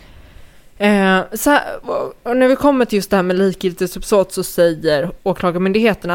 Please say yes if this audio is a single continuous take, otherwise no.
no